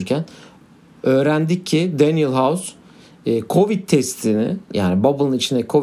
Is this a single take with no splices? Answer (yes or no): yes